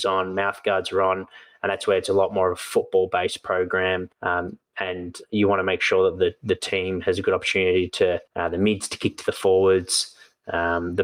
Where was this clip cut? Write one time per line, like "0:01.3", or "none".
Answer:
0:04.1
0:08.3